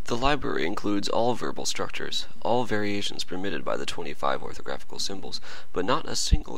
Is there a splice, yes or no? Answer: no